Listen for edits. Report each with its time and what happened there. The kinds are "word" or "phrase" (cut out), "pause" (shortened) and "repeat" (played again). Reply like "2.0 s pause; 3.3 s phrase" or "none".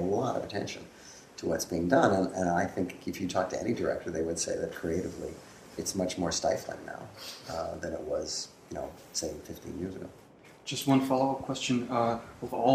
none